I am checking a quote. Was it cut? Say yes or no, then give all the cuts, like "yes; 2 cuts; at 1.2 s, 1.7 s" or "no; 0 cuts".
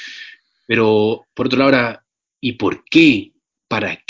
no; 0 cuts